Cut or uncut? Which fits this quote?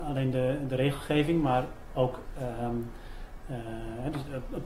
uncut